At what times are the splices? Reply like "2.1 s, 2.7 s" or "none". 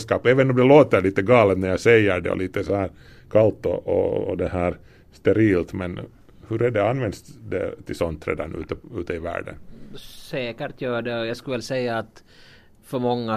none